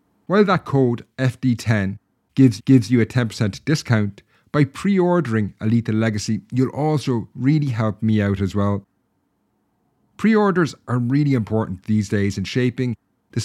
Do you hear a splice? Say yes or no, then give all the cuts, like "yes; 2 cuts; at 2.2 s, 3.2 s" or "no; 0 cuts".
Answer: yes; 1 cut; at 2.6 s